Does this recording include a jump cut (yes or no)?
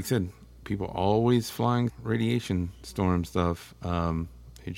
yes